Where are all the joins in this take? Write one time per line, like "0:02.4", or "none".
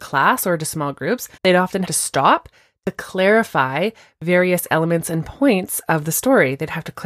0:01.4
0:01.8